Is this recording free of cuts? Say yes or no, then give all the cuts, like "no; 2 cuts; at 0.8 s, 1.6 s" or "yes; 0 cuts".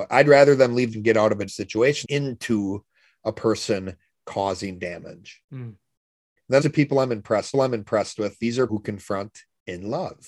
no; 7 cuts; at 0.9 s, 1.5 s, 2.0 s, 5.4 s, 6.6 s, 7.5 s, 8.7 s